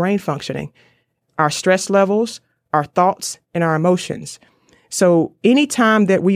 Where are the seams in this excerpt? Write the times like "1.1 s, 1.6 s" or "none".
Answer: none

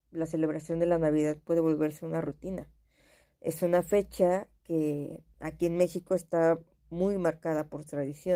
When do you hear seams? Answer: none

